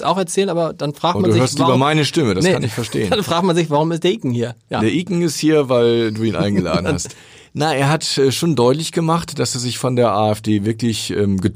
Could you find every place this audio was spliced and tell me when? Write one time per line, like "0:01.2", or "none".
none

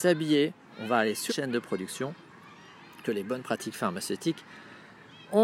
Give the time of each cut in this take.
0:01.3
0:03.0

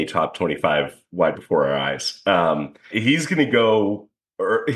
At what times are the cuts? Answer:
0:01.3
0:02.9

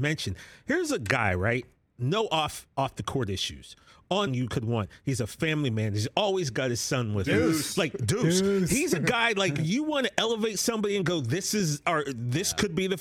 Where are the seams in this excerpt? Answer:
0:04.3
0:09.6

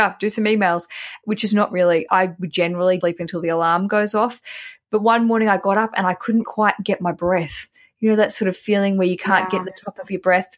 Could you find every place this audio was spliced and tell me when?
0:02.1
0:03.0
0:06.4

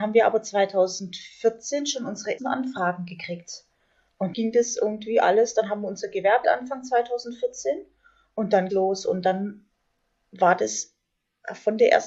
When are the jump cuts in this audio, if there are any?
0:02.4
0:04.3
0:06.4
0:08.7

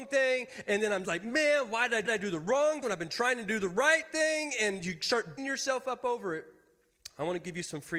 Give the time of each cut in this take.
0:01.0
0:02.1
0:02.8
0:05.4

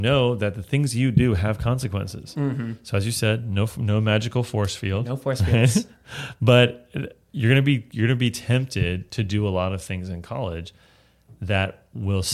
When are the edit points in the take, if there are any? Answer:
none

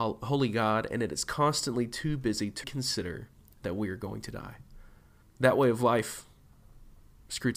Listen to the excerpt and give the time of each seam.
0:02.6
0:05.2

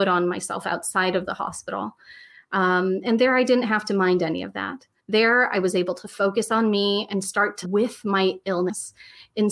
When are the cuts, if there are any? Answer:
0:05.0
0:07.6

